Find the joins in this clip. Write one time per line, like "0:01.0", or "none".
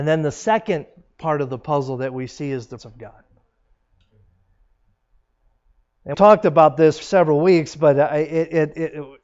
0:02.8
0:06.1
0:07.0